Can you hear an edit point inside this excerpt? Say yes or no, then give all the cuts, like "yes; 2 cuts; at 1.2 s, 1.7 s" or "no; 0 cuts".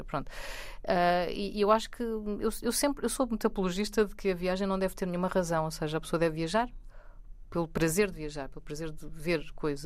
no; 0 cuts